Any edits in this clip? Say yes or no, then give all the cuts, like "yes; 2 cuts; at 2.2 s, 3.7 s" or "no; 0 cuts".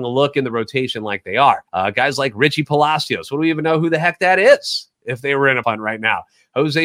yes; 2 cuts; at 1.7 s, 5.6 s